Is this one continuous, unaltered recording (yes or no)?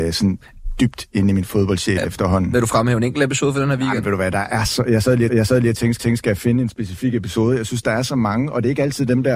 no